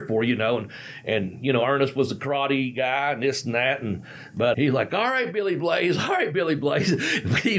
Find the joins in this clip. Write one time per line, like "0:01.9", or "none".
0:04.5